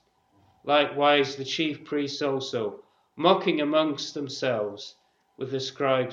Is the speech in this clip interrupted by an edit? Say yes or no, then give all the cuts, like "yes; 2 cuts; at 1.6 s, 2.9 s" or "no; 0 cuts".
no; 0 cuts